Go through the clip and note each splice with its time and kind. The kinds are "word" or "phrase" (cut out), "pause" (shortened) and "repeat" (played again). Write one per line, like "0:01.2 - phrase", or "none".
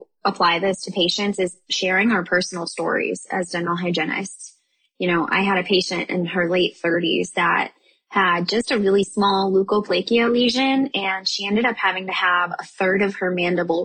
none